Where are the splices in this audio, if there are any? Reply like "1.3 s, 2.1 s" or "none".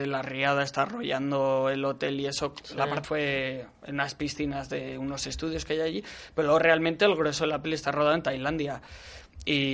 3.0 s